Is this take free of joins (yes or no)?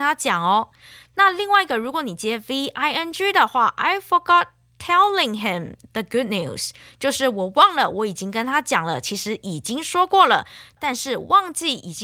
yes